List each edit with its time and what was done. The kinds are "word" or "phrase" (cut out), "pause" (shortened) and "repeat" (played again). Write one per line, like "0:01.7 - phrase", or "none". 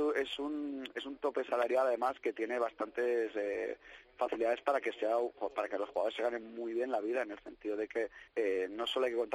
0:08.3 - pause